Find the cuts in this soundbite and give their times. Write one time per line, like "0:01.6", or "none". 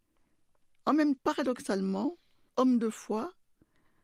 0:01.2
0:02.5